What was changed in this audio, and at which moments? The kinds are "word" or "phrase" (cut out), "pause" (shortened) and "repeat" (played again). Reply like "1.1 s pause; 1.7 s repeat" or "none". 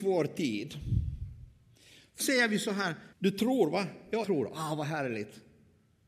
2.2 s word; 3.1 s pause; 4.2 s word